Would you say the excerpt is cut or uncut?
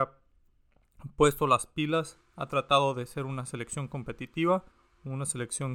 cut